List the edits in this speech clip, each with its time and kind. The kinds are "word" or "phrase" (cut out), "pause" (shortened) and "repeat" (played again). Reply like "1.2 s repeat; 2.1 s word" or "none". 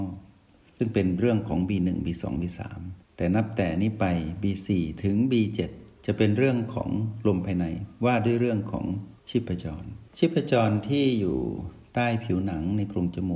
3.0 s pause; 9.2 s pause; 10.1 s pause